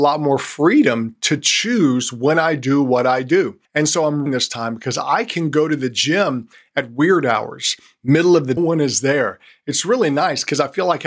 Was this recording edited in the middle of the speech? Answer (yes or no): yes